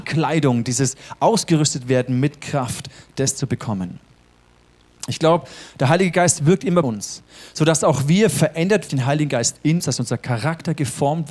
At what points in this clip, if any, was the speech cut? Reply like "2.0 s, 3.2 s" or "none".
6.8 s, 8.9 s, 9.8 s